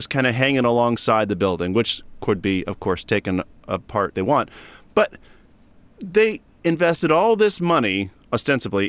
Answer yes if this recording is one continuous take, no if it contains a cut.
no